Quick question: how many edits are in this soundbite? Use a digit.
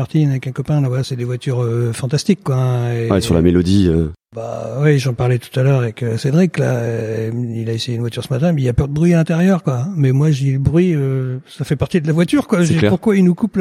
0